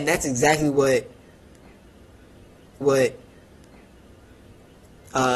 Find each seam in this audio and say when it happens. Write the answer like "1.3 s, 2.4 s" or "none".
2.8 s